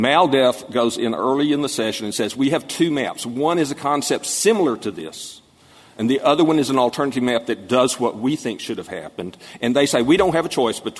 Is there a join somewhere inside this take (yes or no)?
no